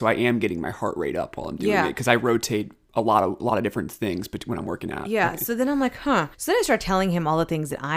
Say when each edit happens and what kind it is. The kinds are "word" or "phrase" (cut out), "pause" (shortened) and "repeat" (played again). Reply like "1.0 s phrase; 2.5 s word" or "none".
6.3 s pause